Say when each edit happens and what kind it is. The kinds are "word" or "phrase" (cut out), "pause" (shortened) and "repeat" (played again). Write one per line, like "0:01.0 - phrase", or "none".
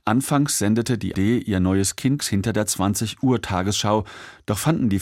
0:01.1 - word
0:02.2 - word